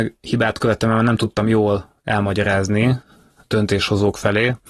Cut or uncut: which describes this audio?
uncut